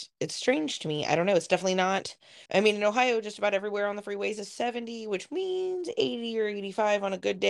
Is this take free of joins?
no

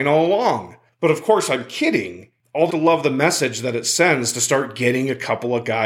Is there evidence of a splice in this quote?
yes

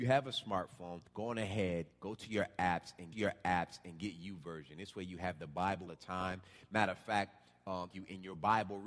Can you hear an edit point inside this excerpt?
yes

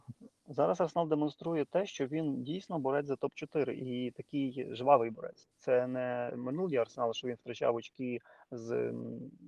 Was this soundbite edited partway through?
yes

